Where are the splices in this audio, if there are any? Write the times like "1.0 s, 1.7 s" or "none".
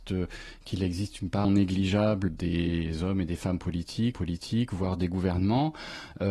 1.4 s, 2.3 s, 4.1 s